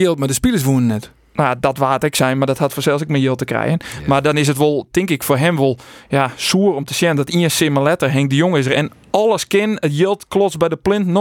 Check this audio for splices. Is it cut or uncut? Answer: uncut